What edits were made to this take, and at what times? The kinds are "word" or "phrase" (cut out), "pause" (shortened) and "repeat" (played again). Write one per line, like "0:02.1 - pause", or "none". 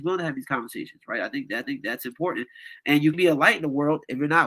0:01.6 - repeat
0:03.1 - word